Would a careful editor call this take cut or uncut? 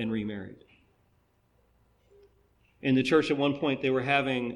uncut